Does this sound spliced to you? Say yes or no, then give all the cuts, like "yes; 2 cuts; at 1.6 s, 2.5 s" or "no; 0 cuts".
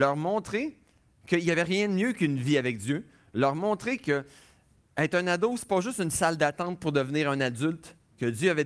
no; 0 cuts